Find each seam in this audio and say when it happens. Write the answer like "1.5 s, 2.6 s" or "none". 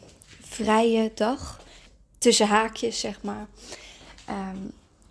none